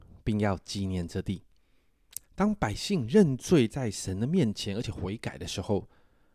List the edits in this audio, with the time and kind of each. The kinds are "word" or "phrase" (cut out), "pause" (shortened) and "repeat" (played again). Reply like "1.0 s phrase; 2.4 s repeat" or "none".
2.2 s pause